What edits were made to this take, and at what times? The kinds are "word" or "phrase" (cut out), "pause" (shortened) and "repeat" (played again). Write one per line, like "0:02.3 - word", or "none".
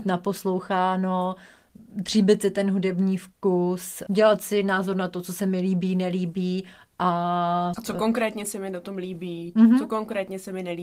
none